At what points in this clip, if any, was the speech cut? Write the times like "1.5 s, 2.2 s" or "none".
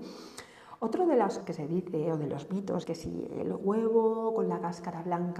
1.4 s, 2.8 s